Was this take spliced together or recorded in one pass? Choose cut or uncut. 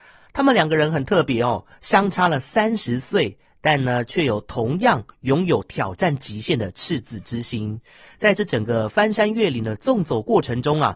uncut